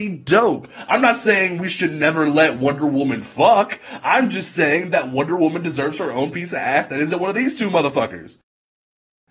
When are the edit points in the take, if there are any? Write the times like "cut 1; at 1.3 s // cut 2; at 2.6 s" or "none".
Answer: none